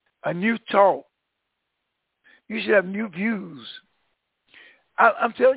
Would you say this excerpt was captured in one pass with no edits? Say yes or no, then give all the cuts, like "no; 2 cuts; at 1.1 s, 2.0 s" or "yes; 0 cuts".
yes; 0 cuts